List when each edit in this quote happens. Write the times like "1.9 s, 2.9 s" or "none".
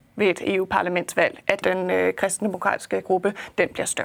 1.6 s, 3.0 s